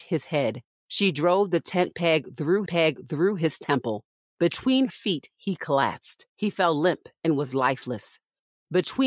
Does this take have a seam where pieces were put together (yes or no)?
yes